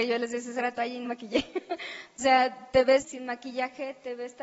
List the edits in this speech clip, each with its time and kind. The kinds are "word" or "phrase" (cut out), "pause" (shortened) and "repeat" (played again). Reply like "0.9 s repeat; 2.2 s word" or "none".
1.0 s word; 2.2 s word; 3.0 s word